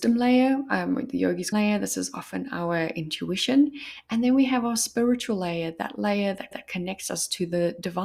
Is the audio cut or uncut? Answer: cut